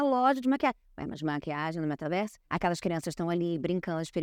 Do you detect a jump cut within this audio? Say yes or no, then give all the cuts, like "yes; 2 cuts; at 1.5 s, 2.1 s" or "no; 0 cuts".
yes; 1 cut; at 2.4 s